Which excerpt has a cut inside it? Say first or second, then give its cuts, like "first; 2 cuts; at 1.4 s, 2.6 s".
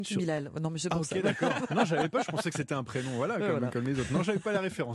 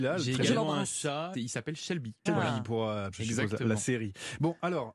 second; 3 cuts; at 1.3 s, 2.3 s, 3.1 s